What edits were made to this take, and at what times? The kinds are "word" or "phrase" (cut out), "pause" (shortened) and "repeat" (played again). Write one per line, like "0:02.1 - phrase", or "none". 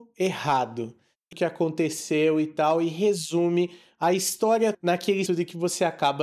0:01.3 - phrase
0:04.7 - word
0:05.3 - word